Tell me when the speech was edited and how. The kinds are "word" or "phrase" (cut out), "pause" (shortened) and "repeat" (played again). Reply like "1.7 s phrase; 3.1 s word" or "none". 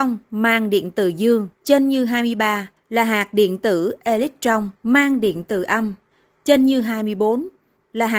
1.5 s pause; 2.8 s pause; 4.8 s pause; 6.1 s pause